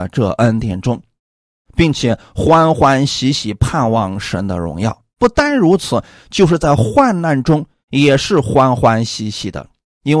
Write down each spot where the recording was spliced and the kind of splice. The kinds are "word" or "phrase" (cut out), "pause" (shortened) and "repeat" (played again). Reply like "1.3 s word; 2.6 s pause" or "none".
none